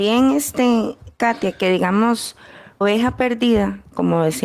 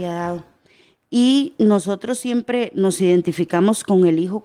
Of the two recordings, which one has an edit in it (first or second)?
first